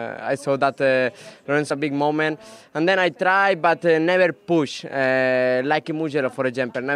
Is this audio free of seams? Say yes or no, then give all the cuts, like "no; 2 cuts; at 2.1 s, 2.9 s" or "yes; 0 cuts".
no; 1 cut; at 1.7 s